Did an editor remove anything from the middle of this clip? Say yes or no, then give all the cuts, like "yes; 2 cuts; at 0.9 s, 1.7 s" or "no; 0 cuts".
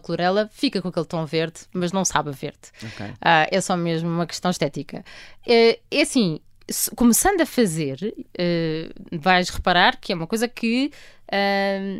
no; 0 cuts